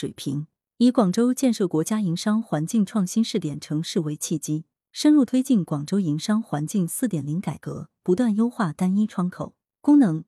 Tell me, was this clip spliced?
no; 0 cuts

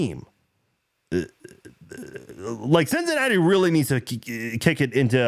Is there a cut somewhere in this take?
no; 0 cuts

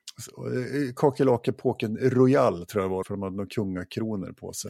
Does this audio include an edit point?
yes; 1 cut; at 3.0 s

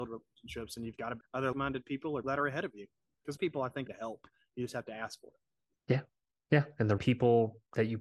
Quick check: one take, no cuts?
no; 6 cuts; at 1.2 s, 1.5 s, 2.2 s, 3.4 s, 3.9 s, 7.0 s

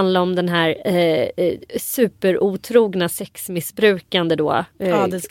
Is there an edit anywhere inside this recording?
no; 0 cuts

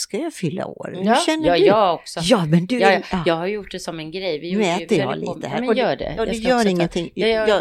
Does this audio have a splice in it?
no; 0 cuts

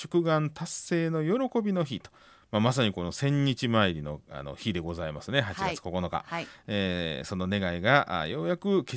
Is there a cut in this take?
no; 0 cuts

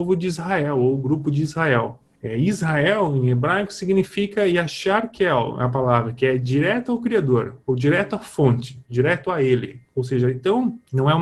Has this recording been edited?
no; 0 cuts

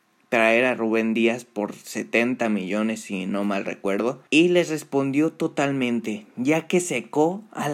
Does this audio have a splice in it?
yes; 1 cut; at 4.3 s

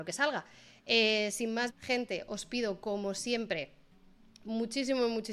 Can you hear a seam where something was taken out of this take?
yes; 1 cut; at 1.7 s

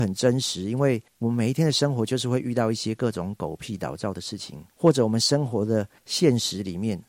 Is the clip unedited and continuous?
no; 3 cuts; at 1.1 s, 4.7 s, 6.0 s

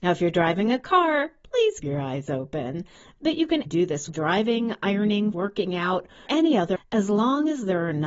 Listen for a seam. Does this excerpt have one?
yes; 6 cuts; at 1.8 s, 3.7 s, 4.1 s, 5.3 s, 6.3 s, 6.8 s

